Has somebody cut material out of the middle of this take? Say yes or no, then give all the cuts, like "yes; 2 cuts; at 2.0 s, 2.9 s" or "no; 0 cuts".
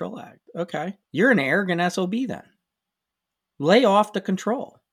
yes; 1 cut; at 1.0 s